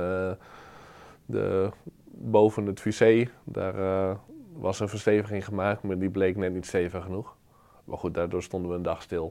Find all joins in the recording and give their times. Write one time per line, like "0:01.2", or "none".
none